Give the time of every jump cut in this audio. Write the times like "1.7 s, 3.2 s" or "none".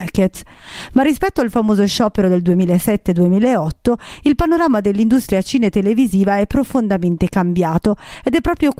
none